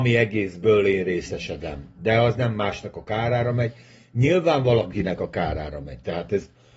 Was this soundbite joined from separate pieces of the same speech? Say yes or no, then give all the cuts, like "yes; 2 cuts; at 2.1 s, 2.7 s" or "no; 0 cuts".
no; 0 cuts